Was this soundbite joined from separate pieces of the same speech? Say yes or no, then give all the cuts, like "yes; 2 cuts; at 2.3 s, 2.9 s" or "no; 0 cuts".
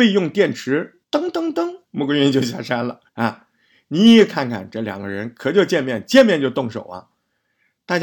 yes; 3 cuts; at 1.0 s, 1.8 s, 3.1 s